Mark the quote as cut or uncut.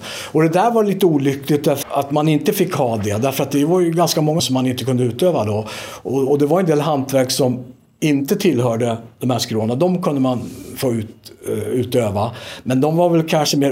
cut